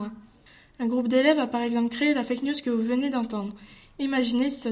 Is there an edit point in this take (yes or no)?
no